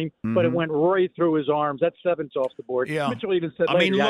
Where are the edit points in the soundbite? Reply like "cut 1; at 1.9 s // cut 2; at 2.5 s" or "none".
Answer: cut 1; at 2.3 s